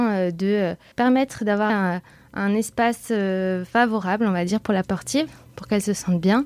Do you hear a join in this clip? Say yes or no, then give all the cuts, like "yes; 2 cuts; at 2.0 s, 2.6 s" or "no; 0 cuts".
yes; 3 cuts; at 0.9 s, 1.7 s, 4.8 s